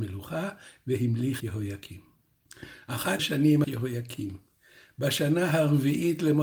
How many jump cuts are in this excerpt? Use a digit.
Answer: 3